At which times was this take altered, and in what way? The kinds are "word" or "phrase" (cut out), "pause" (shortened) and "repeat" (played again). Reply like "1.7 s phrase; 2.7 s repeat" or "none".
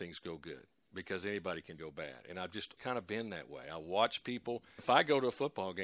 1.8 s phrase; 2.8 s word; 4.8 s word